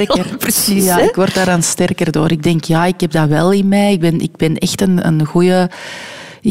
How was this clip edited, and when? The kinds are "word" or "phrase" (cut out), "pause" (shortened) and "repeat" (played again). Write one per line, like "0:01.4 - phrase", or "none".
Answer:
none